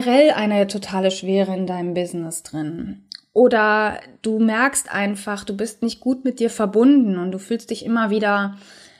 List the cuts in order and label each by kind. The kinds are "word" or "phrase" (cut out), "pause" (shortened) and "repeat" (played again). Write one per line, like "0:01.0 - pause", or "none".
none